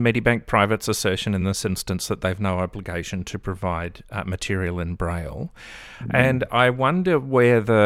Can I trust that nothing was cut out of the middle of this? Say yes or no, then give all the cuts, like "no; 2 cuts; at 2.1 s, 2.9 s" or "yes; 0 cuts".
yes; 0 cuts